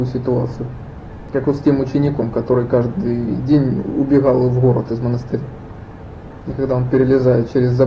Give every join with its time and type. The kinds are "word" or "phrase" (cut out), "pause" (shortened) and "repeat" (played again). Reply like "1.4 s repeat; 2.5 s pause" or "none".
none